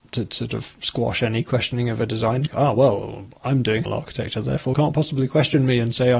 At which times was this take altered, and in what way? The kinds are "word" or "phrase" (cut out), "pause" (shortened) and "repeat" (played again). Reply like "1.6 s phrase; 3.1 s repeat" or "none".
2.5 s word; 3.9 s word; 4.7 s word